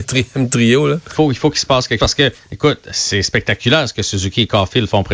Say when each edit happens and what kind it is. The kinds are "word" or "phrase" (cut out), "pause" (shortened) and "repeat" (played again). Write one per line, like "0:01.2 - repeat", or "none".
0:01.1 - phrase
0:02.0 - word